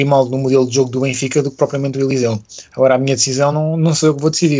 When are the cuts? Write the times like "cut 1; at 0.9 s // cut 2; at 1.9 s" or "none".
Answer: none